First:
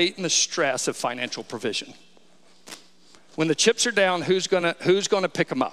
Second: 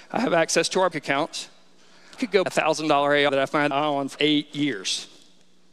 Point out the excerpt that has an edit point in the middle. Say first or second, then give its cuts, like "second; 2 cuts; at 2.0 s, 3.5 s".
second; 6 cuts; at 0.9 s, 2.2 s, 2.5 s, 3.3 s, 3.7 s, 4.2 s